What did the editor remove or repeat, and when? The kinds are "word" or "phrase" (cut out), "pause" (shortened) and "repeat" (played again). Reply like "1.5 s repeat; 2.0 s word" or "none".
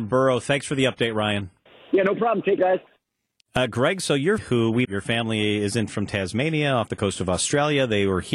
1.7 s pause; 2.6 s word; 4.4 s word; 4.9 s word; 5.9 s word